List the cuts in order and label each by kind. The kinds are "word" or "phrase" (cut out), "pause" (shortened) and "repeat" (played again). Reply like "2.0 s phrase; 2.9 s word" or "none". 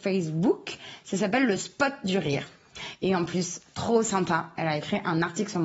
none